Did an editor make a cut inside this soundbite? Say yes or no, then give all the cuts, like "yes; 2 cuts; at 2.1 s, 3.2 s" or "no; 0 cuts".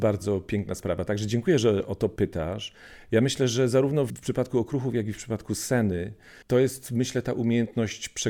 yes; 1 cut; at 6.4 s